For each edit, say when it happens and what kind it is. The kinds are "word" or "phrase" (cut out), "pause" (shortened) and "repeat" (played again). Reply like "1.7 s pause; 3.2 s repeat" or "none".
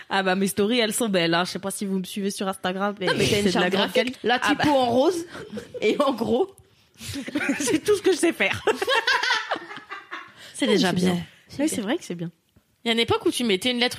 4.1 s word

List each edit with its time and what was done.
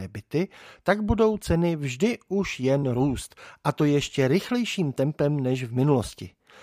none

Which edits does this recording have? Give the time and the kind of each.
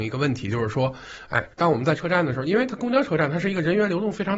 1.5 s pause

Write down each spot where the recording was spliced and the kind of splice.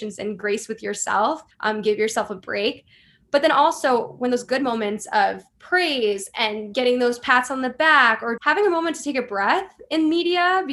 1.5 s pause; 8.4 s word

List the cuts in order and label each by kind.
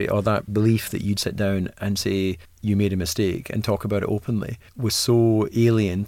1.2 s word; 2.4 s pause; 4.7 s pause

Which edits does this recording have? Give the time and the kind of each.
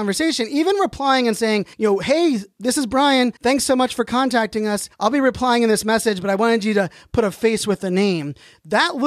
1.7 s pause; 3.4 s pause; 4.9 s pause

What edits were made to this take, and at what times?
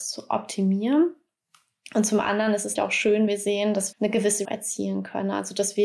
2.8 s word; 3.3 s word; 3.9 s word; 4.4 s phrase

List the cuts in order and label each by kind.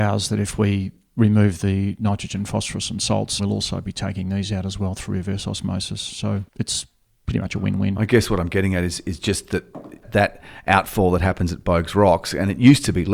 3.4 s phrase; 6.5 s pause

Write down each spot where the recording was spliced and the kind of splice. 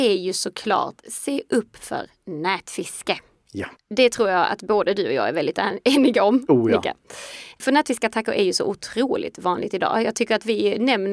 3.8 s pause

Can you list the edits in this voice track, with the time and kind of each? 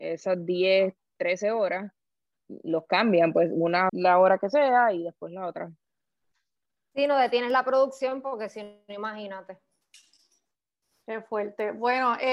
2.4 s word; 3.9 s word

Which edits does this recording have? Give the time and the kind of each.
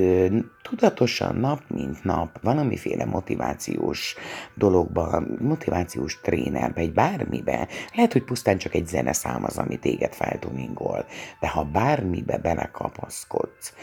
2.4 s word; 5.4 s word

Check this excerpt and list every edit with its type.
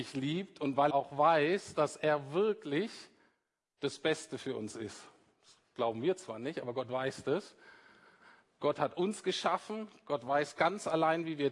0.9 s word

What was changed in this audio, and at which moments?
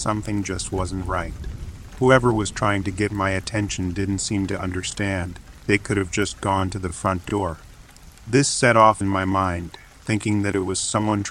9.0 s phrase

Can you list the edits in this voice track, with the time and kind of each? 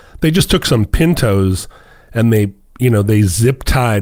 none

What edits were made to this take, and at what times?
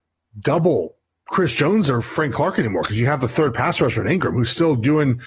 none

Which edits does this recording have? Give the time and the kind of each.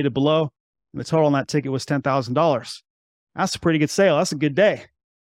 none

